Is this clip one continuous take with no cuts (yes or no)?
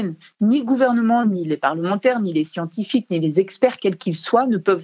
yes